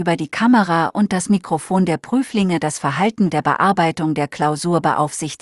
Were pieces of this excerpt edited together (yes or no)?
yes